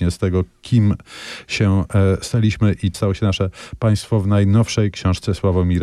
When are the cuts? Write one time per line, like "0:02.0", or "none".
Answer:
0:02.9